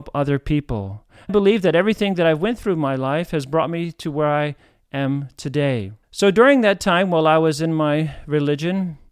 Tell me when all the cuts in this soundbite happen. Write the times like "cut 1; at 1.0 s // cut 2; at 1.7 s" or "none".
cut 1; at 1.3 s // cut 2; at 6.0 s